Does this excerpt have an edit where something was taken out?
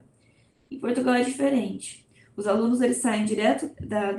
no; 0 cuts

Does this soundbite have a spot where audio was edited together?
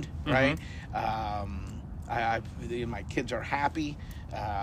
no; 0 cuts

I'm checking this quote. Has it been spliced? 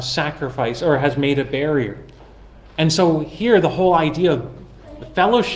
no; 0 cuts

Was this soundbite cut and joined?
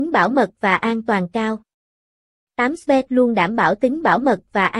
no; 0 cuts

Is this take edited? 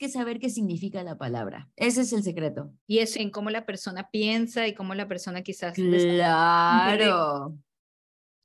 yes; 3 cuts; at 1.7 s, 2.8 s, 3.1 s

